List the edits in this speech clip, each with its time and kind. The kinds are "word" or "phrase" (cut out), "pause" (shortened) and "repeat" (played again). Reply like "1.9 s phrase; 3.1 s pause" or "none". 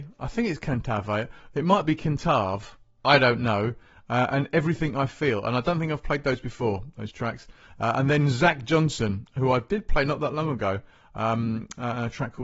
none